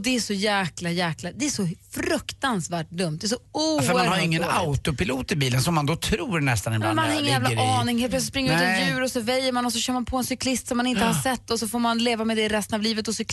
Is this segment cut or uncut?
uncut